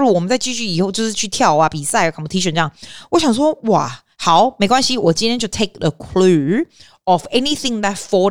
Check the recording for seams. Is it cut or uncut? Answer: uncut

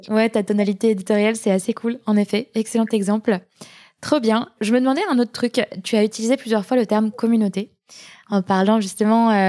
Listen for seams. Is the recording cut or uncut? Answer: uncut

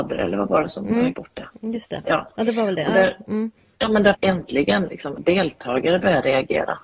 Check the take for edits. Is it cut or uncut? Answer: cut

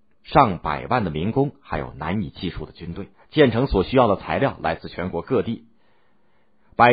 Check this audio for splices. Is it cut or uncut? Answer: cut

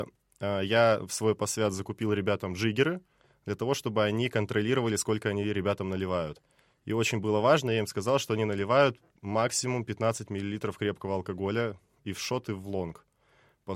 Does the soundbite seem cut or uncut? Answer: uncut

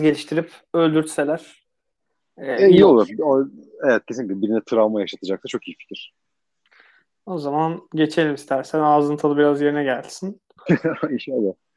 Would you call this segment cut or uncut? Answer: uncut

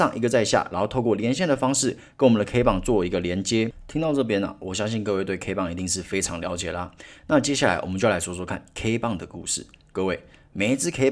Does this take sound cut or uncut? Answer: uncut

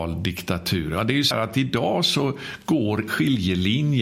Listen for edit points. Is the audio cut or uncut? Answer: cut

